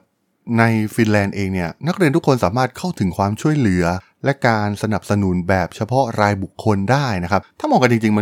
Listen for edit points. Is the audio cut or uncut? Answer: cut